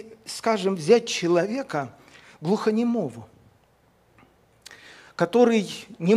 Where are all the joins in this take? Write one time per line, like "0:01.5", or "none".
none